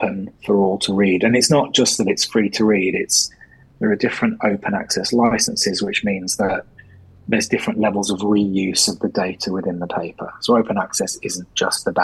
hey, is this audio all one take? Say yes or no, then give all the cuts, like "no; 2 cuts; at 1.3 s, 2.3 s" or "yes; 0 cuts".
yes; 0 cuts